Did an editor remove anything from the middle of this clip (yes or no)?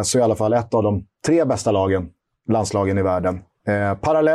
no